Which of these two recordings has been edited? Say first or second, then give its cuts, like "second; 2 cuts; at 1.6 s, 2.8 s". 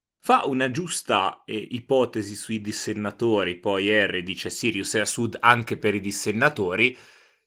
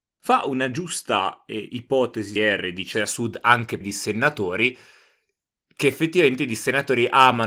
second; 3 cuts; at 2.4 s, 2.9 s, 3.8 s